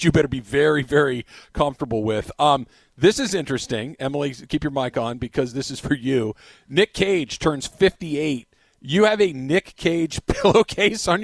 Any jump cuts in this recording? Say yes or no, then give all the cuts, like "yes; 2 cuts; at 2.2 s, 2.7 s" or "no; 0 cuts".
no; 0 cuts